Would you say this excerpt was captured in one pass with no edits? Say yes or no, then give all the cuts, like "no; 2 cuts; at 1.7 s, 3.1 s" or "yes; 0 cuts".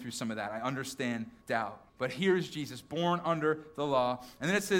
no; 2 cuts; at 1.4 s, 1.9 s